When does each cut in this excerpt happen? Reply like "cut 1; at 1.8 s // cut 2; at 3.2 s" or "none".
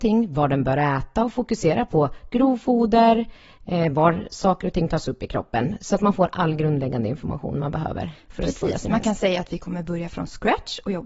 none